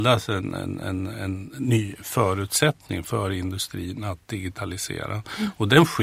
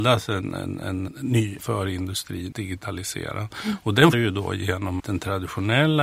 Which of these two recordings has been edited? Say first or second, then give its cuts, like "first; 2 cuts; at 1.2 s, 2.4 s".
second; 5 cuts; at 1.1 s, 1.6 s, 2.5 s, 4.1 s, 5.0 s